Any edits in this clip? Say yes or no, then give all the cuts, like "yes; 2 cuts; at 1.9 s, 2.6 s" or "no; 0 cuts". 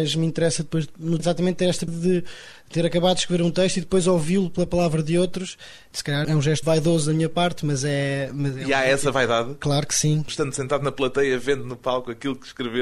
yes; 4 cuts; at 1.2 s, 1.9 s, 6.2 s, 6.6 s